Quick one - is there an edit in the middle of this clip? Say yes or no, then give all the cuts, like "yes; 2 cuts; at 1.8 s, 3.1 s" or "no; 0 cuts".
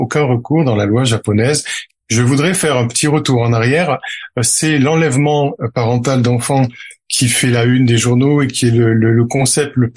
no; 0 cuts